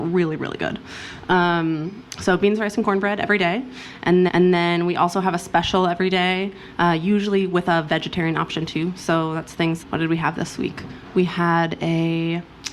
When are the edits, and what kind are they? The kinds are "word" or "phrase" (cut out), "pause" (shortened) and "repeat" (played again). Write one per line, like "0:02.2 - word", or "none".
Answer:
0:04.3 - repeat
0:09.8 - word